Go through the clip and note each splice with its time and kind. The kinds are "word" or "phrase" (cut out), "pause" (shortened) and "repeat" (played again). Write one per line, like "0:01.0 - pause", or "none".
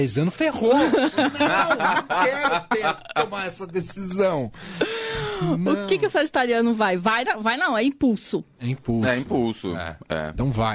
none